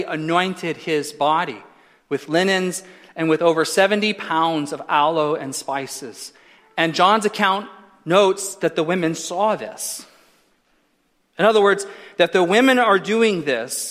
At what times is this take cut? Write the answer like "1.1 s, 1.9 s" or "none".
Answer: none